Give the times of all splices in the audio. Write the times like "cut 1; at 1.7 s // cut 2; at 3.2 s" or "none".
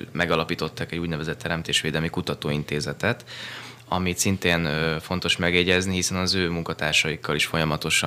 none